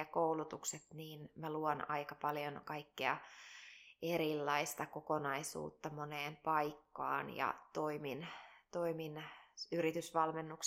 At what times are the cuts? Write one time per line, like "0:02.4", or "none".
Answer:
none